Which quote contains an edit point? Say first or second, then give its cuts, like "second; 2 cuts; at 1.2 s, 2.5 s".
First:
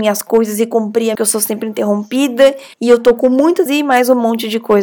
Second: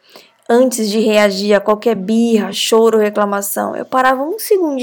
first; 3 cuts; at 1.1 s, 2.7 s, 3.7 s